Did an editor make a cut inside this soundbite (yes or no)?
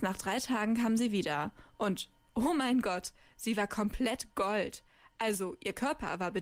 no